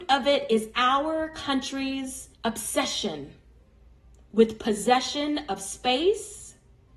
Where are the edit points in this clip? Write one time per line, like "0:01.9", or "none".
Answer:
0:02.3